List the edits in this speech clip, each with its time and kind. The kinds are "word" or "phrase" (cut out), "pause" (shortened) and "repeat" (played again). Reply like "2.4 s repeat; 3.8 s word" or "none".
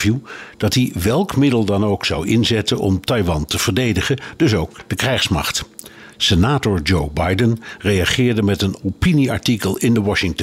none